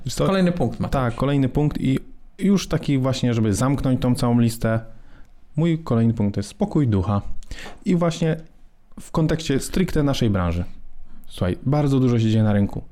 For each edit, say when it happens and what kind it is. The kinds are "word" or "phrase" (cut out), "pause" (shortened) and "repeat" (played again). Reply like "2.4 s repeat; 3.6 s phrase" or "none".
none